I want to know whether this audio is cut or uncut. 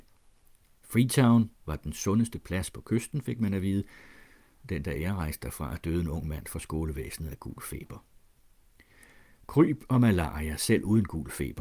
uncut